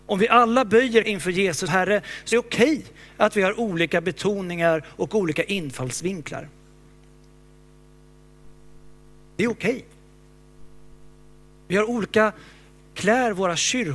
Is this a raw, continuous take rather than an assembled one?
no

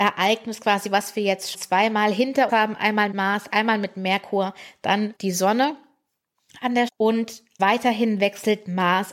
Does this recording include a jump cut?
yes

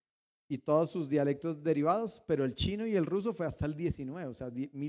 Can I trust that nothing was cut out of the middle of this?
yes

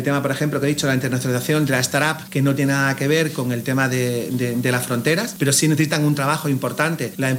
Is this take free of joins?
yes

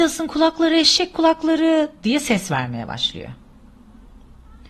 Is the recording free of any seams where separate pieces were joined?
yes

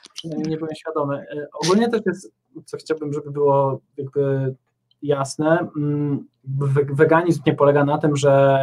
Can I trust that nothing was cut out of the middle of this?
no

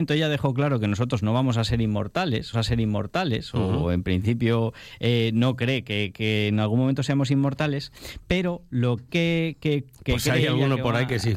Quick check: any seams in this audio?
yes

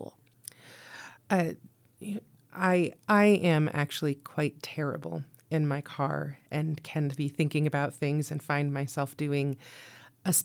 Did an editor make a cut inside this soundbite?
no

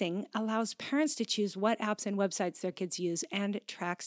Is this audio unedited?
yes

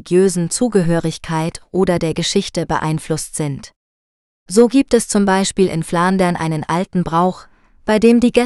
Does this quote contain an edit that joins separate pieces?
no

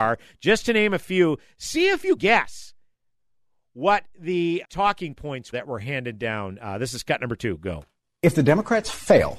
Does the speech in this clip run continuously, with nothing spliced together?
no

